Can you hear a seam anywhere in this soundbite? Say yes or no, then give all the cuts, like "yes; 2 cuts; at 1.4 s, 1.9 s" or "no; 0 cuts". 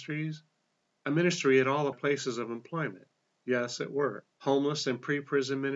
yes; 2 cuts; at 1.9 s, 4.3 s